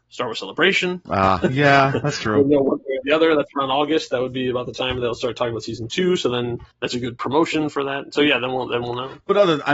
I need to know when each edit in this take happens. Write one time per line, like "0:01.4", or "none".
0:06.7